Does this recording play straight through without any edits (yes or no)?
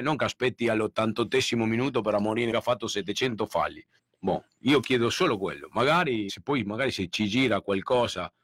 no